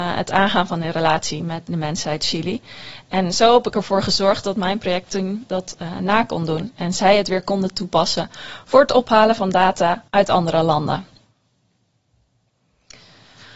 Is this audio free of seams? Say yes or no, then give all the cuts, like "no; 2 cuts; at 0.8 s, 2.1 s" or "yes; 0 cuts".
no; 2 cuts; at 1.7 s, 10.1 s